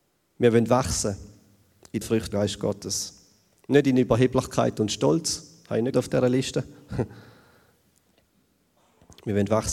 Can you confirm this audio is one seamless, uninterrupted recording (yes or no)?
no